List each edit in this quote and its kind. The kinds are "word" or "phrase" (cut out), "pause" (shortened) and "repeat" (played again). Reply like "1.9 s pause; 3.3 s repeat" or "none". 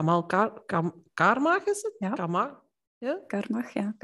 none